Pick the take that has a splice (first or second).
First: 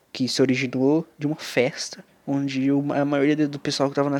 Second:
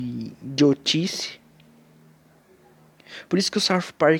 first